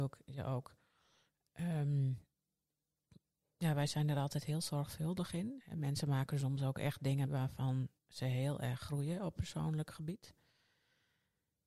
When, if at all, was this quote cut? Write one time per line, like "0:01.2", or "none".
0:07.3
0:08.0